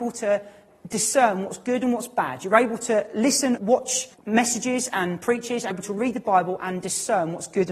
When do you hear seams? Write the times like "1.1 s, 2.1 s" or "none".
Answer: 3.6 s, 4.1 s, 5.7 s